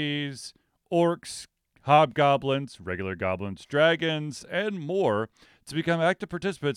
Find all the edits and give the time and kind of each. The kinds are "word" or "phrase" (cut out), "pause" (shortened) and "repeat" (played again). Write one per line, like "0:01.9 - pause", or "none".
none